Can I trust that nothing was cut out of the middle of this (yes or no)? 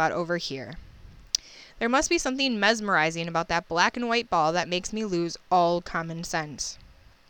yes